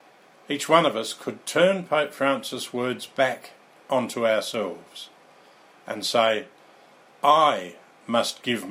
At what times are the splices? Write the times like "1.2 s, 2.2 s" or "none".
none

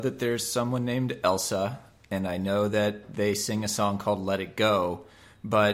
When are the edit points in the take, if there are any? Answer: none

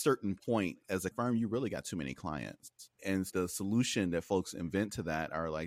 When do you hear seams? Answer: 1.1 s, 3.0 s

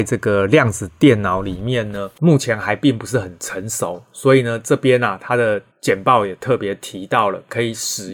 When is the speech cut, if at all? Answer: 2.2 s, 5.7 s

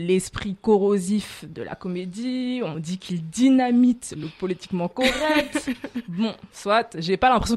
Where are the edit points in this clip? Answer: none

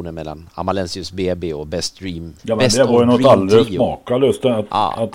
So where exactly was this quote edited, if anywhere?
2.4 s

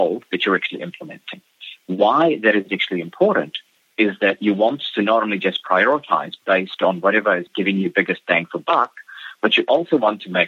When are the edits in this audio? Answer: none

